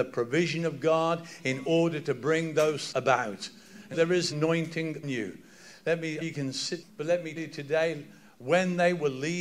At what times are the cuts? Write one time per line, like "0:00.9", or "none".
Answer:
0:02.9
0:03.9
0:04.3
0:05.0
0:06.2
0:06.8
0:07.4